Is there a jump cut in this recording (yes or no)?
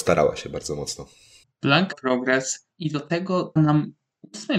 yes